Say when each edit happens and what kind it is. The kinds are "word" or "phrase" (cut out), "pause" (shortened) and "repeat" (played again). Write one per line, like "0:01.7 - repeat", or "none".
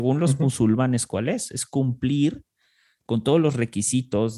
none